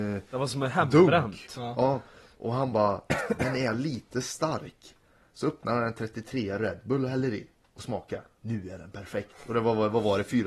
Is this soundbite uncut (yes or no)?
yes